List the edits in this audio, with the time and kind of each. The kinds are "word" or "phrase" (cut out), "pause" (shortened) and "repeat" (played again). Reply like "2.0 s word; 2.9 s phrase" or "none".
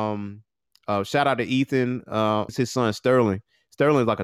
2.5 s word

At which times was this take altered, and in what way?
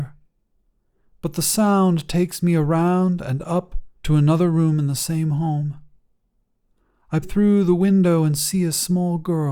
4.0 s pause; 7.2 s word

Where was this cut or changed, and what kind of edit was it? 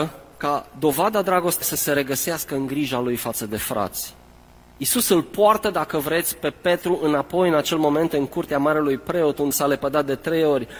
1.6 s word; 9.5 s word

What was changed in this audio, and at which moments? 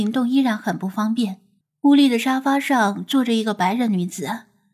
1.6 s pause

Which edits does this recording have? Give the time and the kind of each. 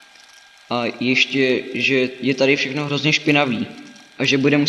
none

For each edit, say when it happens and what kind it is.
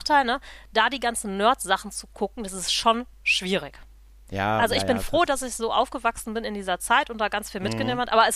3.1 s pause

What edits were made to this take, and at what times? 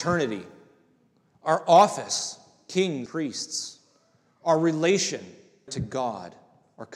3.1 s word; 5.7 s word

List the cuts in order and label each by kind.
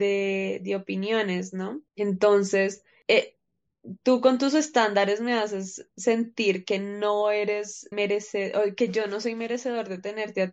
1.9 s pause; 7.9 s word

